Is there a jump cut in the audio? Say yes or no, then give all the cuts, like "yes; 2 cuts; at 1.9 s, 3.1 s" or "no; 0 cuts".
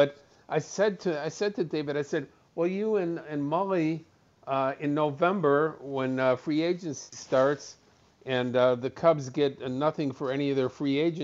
no; 0 cuts